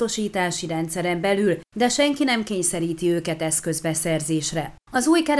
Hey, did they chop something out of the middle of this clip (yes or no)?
no